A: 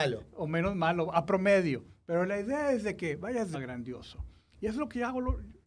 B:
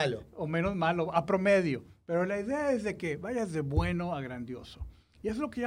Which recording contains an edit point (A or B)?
A